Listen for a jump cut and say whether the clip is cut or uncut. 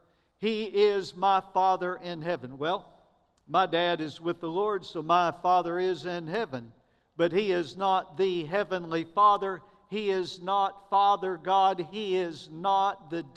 uncut